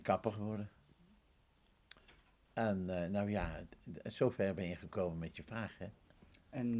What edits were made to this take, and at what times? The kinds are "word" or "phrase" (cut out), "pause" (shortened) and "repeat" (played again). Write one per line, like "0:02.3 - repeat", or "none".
none

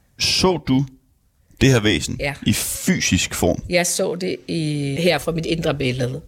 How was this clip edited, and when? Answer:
0:05.0 - word

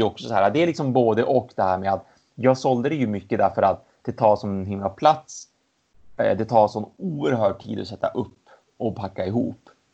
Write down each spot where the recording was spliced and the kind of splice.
none

